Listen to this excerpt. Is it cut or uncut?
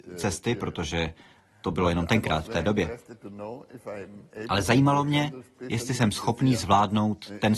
uncut